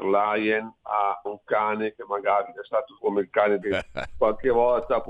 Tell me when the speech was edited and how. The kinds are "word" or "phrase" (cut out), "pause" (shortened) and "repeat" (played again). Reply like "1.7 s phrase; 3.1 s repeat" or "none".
1.3 s word; 3.0 s word; 3.6 s phrase